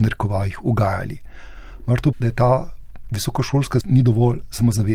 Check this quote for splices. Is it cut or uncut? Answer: cut